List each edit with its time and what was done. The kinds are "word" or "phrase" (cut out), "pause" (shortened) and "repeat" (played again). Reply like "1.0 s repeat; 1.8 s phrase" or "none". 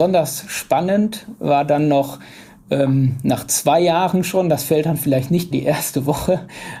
5.5 s phrase

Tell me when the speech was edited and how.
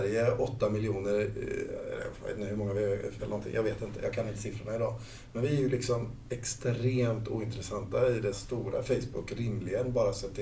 3.2 s phrase; 8.3 s word

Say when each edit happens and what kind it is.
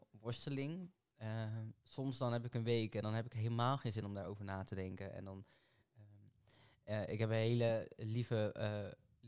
none

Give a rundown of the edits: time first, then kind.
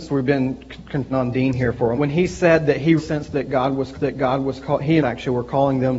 1.1 s phrase; 2.0 s phrase; 3.0 s word; 3.9 s repeat; 5.0 s phrase

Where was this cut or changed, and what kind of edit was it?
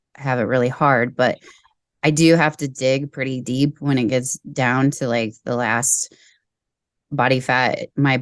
none

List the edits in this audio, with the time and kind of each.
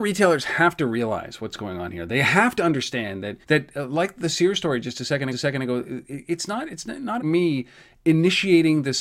3.4 s pause; 5.3 s repeat; 7.2 s word

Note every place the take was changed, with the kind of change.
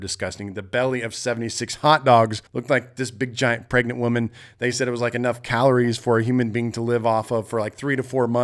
2.5 s pause

